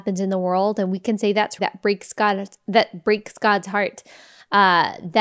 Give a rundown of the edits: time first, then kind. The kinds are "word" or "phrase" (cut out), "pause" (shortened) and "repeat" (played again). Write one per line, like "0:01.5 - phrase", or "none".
0:01.6 - word